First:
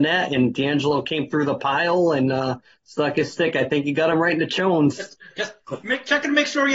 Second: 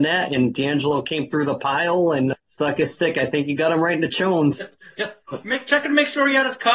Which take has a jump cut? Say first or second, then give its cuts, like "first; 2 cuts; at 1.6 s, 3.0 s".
second; 1 cut; at 2.3 s